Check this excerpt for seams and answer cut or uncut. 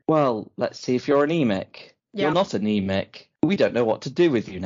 uncut